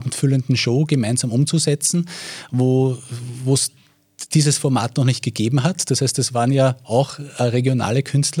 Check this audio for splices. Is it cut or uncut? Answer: uncut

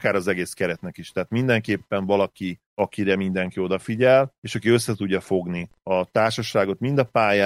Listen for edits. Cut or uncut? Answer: uncut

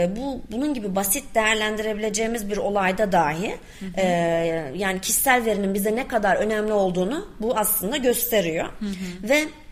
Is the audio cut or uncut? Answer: uncut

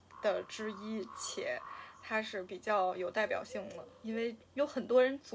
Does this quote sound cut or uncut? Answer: cut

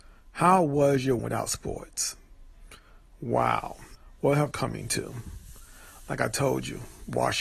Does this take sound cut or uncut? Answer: cut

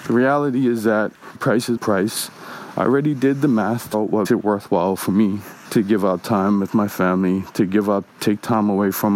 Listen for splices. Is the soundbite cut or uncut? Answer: cut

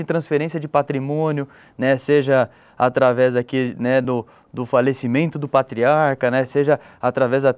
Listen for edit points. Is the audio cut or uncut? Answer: uncut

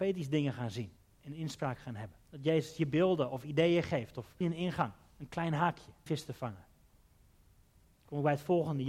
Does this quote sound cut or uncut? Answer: cut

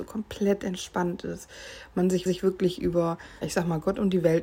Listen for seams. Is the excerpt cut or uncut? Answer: cut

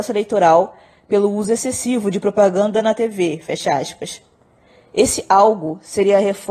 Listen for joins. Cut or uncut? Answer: uncut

